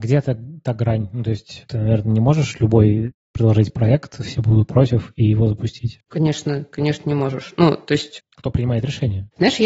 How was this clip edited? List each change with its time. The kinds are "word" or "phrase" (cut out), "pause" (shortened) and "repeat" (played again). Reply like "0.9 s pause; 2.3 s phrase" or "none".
none